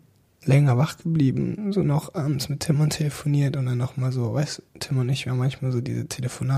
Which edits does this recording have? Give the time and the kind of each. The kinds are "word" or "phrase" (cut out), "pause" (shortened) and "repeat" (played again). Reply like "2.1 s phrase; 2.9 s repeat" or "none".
4.7 s pause